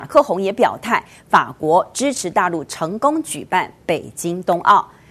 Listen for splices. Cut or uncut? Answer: uncut